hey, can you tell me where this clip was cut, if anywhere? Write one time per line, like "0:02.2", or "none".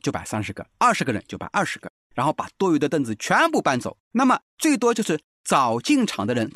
0:04.0
0:04.5